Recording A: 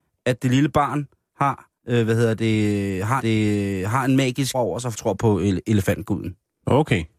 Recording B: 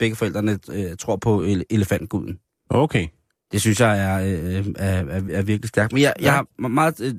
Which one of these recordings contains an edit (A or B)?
A